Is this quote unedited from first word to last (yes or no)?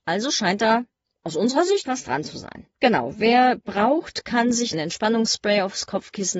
no